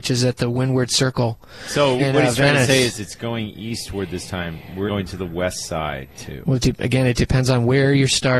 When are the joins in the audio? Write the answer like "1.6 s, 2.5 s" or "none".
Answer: 2.0 s, 4.9 s